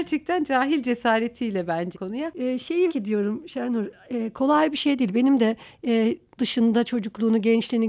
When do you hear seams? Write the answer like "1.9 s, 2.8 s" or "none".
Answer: 1.9 s, 2.9 s, 6.4 s